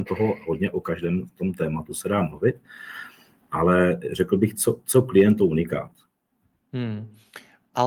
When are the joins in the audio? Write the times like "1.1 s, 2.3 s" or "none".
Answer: none